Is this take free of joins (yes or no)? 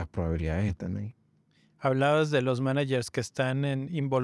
yes